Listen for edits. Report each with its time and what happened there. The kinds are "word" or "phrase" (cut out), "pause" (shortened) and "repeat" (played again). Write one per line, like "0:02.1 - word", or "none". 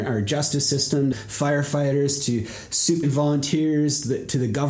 0:01.1 - word
0:03.0 - word